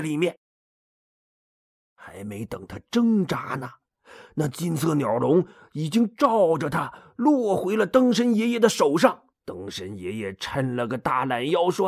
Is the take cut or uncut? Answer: cut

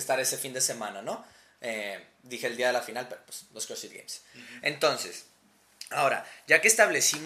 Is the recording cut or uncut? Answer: uncut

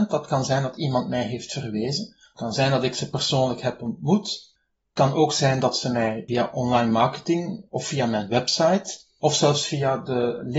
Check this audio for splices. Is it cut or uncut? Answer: uncut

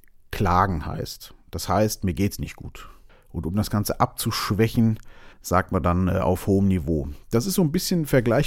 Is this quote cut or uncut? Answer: cut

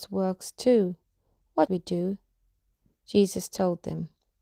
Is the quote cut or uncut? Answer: cut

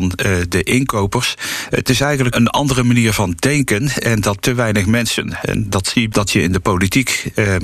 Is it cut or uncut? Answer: cut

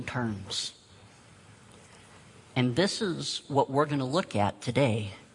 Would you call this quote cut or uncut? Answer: uncut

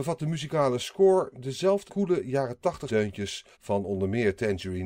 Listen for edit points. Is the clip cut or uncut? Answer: cut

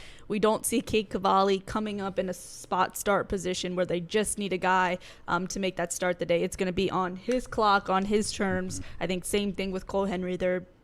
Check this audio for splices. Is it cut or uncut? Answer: uncut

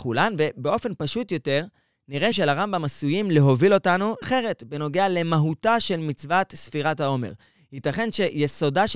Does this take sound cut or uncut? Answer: cut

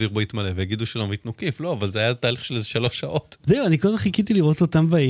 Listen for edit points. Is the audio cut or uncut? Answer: uncut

